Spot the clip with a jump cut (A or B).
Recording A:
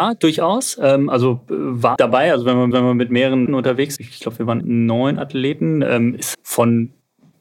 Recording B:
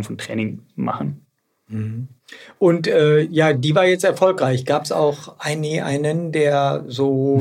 A